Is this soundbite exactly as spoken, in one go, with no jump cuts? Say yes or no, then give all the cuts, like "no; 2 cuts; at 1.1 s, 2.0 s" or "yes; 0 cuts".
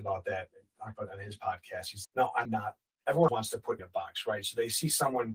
no; 4 cuts; at 2.0 s, 2.5 s, 3.3 s, 3.8 s